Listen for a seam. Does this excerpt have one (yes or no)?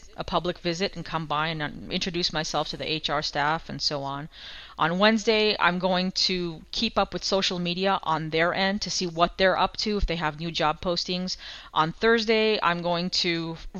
no